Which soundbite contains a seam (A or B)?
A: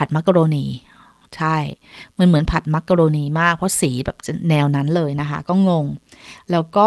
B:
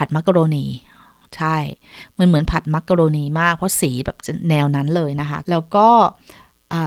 B